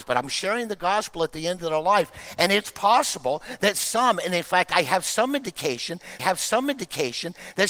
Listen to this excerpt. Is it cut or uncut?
cut